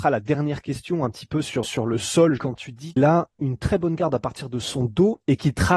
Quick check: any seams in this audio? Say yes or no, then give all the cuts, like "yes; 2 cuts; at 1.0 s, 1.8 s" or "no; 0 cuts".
yes; 3 cuts; at 1.6 s, 2.4 s, 3.0 s